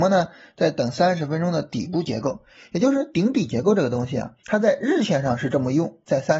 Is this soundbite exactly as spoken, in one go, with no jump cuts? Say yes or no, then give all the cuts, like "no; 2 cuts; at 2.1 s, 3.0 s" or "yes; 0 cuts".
no; 1 cut; at 4.4 s